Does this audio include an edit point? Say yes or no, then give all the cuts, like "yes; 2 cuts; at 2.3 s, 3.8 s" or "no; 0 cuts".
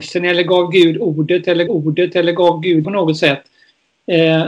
yes; 2 cuts; at 1.7 s, 2.8 s